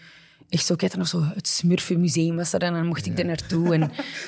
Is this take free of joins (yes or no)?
yes